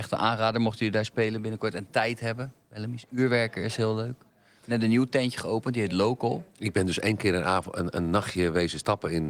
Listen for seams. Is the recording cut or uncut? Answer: uncut